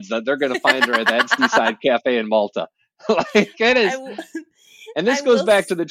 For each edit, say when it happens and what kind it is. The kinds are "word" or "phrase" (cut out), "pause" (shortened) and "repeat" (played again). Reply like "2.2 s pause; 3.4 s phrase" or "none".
none